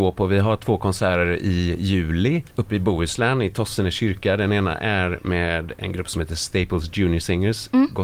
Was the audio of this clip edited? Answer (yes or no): yes